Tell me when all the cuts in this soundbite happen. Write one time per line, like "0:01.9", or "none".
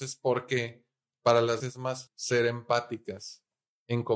0:01.6
0:02.1